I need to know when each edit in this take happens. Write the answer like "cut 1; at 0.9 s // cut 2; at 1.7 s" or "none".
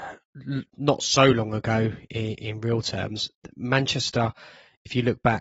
none